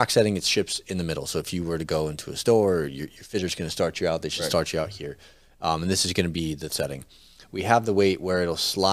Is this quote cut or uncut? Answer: cut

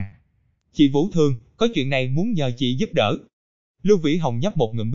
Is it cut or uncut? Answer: uncut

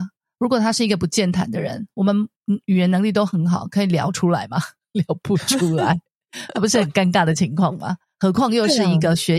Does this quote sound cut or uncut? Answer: uncut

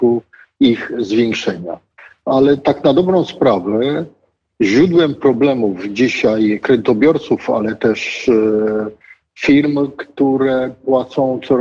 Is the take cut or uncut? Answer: uncut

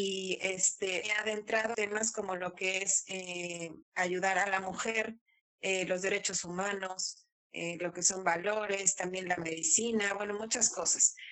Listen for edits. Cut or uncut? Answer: cut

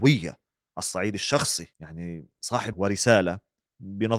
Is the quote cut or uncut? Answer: cut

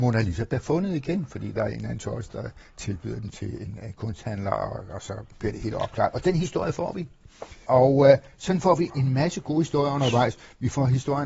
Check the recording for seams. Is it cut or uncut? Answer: cut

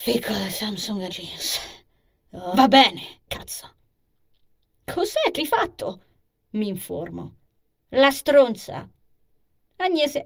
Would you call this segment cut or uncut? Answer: cut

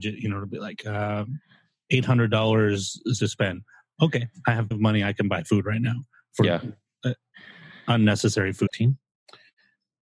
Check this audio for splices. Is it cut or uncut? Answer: cut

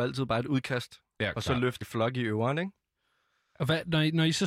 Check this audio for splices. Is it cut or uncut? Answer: cut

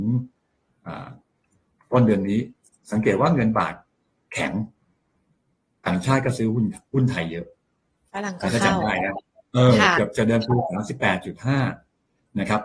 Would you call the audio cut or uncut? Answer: uncut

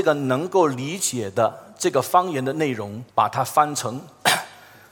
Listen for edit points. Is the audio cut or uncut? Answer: cut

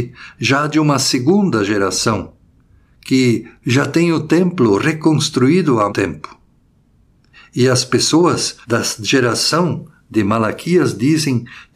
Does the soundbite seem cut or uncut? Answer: cut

